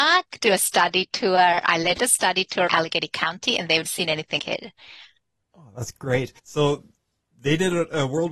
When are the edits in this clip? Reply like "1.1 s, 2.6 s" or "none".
2.7 s, 3.8 s, 4.4 s, 6.4 s

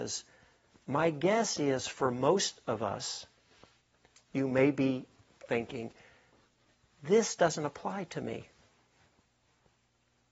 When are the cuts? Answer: none

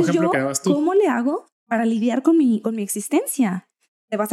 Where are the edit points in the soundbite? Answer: 1.6 s

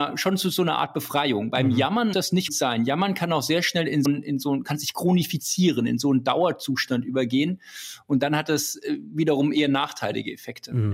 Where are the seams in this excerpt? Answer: 2.1 s, 2.5 s, 4.1 s

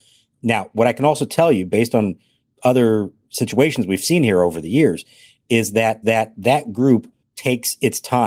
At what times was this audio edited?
6.0 s

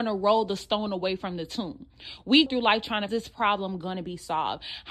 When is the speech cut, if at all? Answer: 2.5 s, 3.1 s

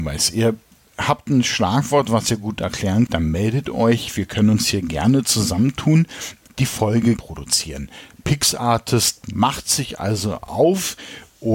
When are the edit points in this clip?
3.1 s, 6.5 s, 7.2 s

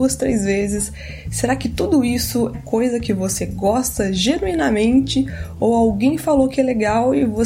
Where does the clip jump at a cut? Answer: 2.5 s

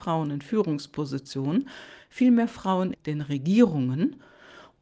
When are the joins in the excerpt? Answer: 2.9 s

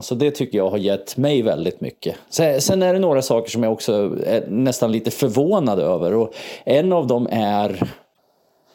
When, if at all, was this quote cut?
none

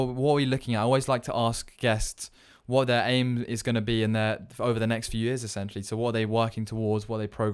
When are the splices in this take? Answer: none

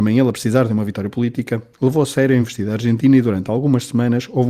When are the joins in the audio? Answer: none

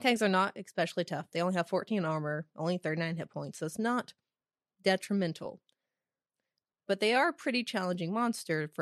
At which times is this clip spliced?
none

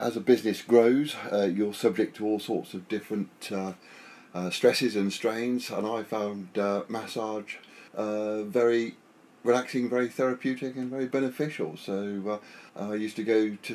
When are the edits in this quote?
7.9 s, 12.7 s

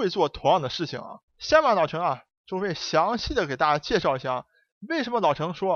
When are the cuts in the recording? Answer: 1.3 s

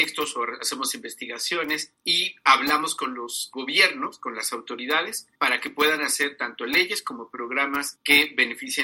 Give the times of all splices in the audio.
none

